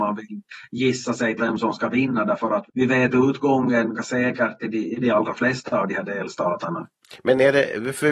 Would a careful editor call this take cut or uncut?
cut